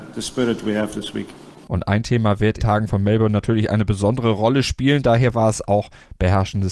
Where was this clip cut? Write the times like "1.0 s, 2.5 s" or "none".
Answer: 2.6 s